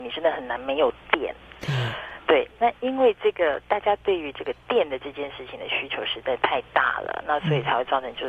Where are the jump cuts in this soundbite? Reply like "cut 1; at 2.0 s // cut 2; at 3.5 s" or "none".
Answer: cut 1; at 2.2 s